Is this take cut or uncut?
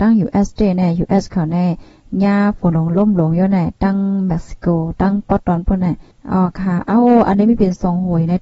cut